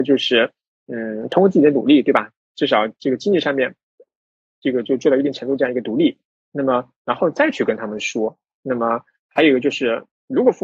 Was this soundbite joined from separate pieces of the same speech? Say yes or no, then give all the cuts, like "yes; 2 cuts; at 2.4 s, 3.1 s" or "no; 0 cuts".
no; 0 cuts